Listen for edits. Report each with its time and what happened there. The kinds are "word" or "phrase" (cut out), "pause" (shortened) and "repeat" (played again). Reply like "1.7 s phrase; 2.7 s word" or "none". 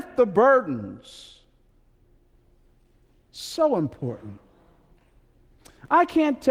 none